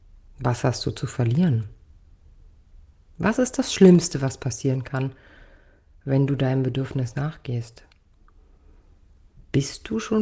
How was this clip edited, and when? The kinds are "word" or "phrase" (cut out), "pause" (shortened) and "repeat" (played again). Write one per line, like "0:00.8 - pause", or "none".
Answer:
none